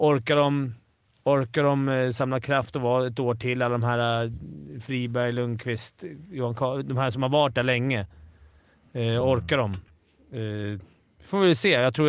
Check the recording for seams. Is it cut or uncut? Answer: uncut